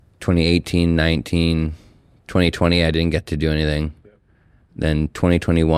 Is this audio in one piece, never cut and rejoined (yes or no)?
yes